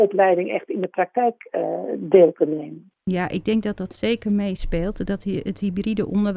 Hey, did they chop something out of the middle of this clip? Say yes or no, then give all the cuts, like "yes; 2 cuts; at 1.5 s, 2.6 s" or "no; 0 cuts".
no; 0 cuts